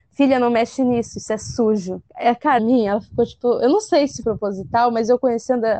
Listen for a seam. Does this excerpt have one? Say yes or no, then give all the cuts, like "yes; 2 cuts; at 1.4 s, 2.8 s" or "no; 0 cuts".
yes; 3 cuts; at 2.1 s, 2.6 s, 4.2 s